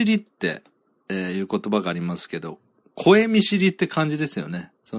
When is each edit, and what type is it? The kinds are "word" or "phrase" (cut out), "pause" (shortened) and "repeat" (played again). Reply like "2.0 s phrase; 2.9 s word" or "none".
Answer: none